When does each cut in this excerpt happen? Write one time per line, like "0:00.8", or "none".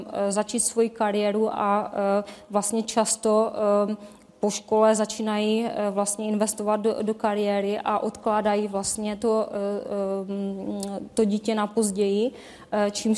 none